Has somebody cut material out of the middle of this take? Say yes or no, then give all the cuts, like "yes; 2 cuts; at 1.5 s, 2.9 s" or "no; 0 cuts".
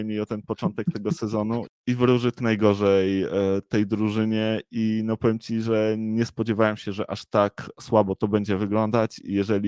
yes; 2 cuts; at 1.7 s, 2.4 s